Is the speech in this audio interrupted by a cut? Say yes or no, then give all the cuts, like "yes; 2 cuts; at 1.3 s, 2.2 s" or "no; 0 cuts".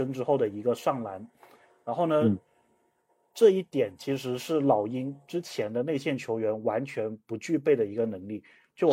no; 0 cuts